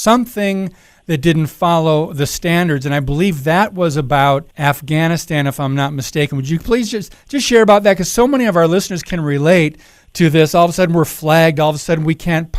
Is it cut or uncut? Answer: cut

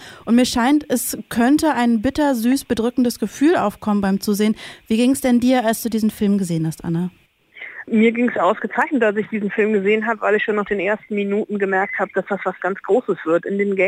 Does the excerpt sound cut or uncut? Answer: uncut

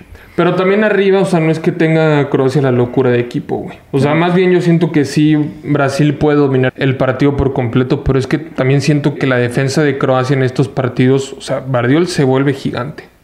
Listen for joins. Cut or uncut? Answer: cut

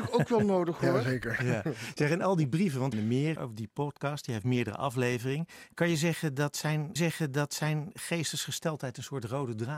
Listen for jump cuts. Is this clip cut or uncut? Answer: cut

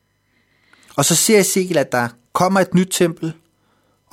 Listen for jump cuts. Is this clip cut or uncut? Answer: uncut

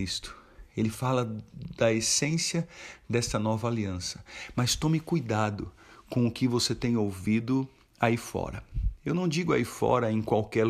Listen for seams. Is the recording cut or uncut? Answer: uncut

